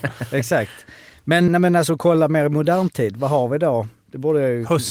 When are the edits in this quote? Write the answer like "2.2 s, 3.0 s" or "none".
1.5 s